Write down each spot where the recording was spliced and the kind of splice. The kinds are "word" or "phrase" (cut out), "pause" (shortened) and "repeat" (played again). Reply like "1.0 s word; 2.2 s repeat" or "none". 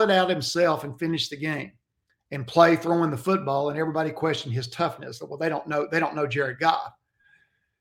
none